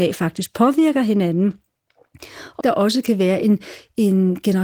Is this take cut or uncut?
cut